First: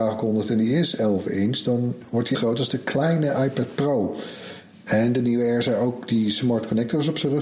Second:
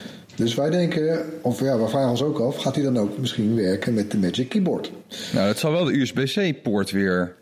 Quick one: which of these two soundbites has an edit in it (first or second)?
first